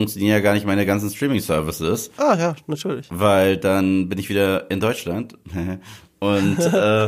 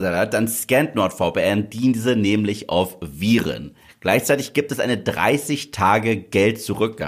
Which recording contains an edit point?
first; 1 cut; at 2.1 s

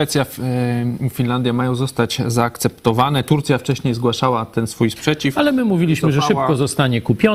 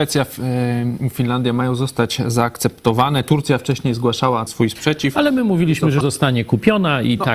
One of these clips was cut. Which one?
second; 2 cuts; at 4.5 s, 6.0 s

